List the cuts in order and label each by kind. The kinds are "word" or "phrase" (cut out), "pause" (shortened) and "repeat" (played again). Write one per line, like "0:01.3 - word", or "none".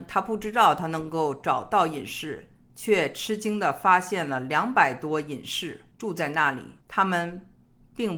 0:06.8 - pause